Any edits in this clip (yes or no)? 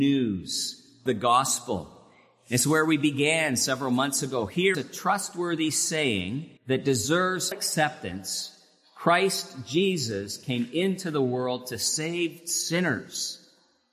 yes